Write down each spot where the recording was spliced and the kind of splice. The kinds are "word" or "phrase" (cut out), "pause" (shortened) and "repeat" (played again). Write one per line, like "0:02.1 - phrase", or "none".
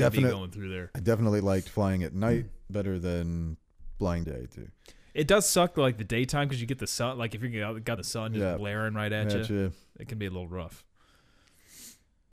0:04.2 - phrase
0:08.0 - phrase